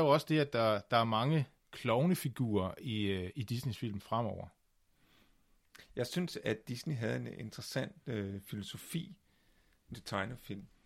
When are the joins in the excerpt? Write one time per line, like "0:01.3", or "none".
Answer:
0:09.9